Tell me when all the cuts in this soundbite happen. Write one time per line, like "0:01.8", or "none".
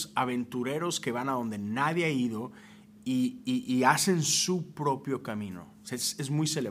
none